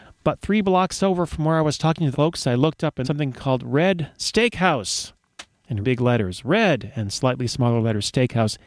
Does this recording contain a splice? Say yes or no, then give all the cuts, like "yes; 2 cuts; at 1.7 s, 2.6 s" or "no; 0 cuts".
yes; 3 cuts; at 2.1 s, 3.0 s, 5.8 s